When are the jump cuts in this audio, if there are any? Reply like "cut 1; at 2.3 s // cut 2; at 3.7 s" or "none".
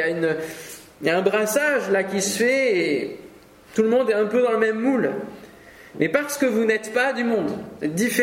none